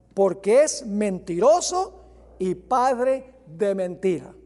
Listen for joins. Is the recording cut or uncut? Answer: uncut